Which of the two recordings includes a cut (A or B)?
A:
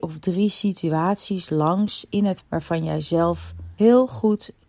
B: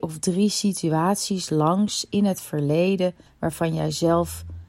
A